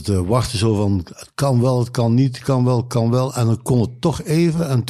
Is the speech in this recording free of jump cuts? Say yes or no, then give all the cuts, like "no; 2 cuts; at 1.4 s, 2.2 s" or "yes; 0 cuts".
yes; 0 cuts